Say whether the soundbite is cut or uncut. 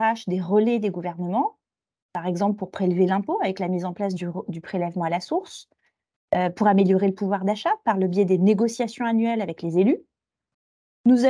uncut